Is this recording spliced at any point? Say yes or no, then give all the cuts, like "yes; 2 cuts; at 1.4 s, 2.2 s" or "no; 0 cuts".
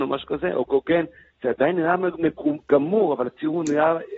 no; 0 cuts